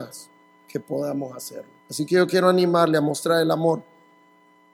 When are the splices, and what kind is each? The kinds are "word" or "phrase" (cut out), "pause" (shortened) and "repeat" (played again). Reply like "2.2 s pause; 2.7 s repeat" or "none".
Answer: 1.8 s pause